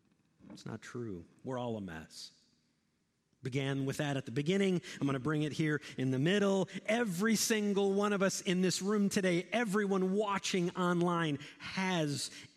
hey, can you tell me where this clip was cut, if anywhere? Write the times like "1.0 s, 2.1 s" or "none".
none